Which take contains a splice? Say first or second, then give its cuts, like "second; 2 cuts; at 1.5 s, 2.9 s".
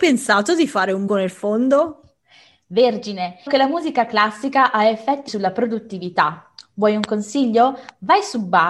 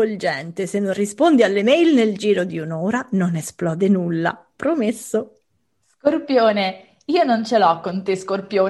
first; 3 cuts; at 1.1 s, 3.5 s, 5.3 s